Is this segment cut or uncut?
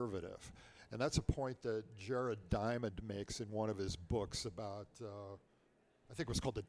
uncut